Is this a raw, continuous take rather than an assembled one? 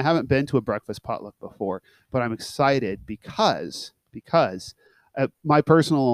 yes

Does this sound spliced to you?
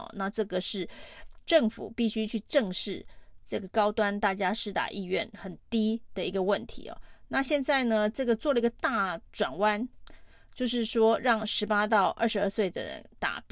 yes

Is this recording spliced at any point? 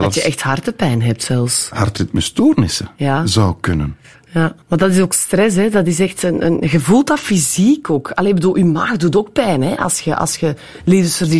yes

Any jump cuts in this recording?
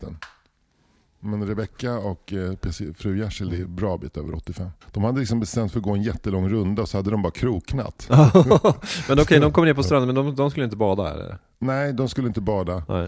yes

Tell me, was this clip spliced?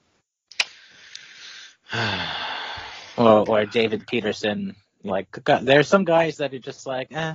yes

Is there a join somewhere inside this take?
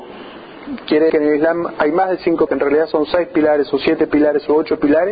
yes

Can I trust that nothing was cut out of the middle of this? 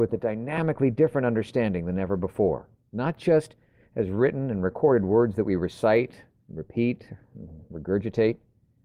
yes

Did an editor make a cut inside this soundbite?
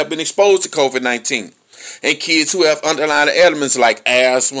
no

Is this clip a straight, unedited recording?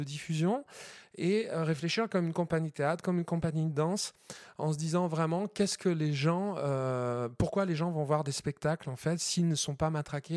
yes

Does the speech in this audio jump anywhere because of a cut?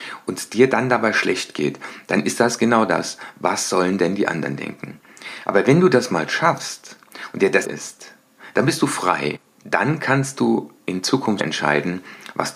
yes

